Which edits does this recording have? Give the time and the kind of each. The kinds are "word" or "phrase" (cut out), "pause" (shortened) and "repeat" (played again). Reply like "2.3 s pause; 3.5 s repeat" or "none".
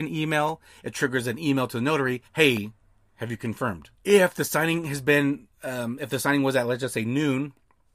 2.3 s pause; 3.9 s pause; 5.5 s pause